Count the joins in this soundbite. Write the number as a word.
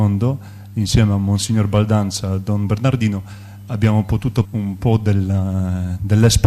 one